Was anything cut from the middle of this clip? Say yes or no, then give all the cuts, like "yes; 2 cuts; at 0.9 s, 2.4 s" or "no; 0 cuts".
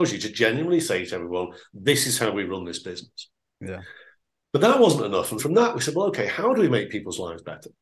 yes; 1 cut; at 5.4 s